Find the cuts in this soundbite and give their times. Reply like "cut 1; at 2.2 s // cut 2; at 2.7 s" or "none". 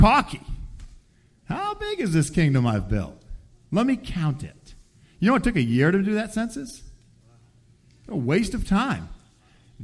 none